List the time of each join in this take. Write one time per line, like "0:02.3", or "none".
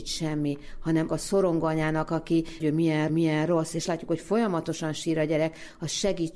0:01.1
0:02.6
0:03.1
0:03.8